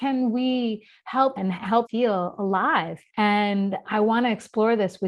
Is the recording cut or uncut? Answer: cut